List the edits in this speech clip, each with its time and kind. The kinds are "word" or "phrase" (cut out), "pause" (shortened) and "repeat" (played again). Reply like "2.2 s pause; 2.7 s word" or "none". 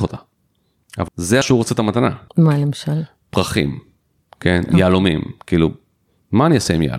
1.1 s phrase; 1.4 s word; 2.3 s pause